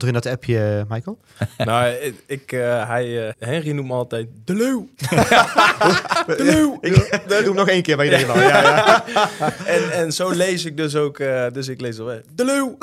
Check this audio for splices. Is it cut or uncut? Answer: cut